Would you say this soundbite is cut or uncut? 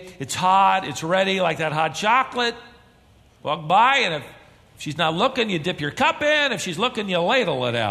uncut